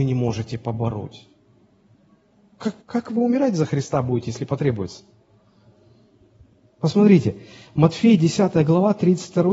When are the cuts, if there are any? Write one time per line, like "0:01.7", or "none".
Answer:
0:02.8